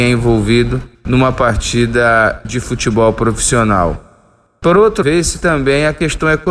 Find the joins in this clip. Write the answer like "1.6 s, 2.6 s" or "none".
0.9 s, 5.0 s